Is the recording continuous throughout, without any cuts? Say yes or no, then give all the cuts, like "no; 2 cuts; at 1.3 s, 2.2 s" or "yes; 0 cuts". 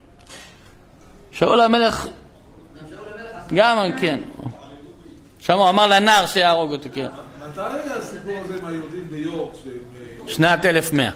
yes; 0 cuts